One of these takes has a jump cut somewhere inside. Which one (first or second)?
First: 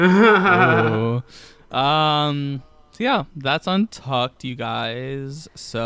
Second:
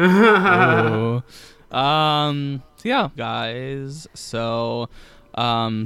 second